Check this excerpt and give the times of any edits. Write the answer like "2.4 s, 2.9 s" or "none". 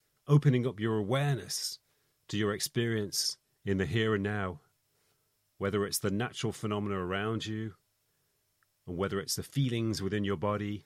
none